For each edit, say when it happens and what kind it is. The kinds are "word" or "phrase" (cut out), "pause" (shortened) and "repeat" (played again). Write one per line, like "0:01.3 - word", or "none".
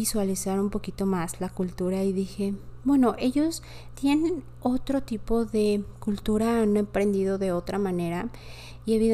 none